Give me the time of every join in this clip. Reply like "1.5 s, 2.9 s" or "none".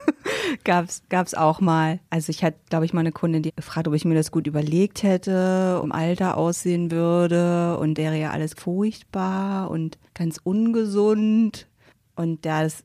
2.0 s, 3.5 s, 5.8 s, 8.0 s, 8.6 s, 10.1 s